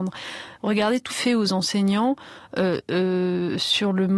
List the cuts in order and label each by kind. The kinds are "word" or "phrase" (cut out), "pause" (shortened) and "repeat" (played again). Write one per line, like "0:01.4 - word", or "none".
0:01.1 - phrase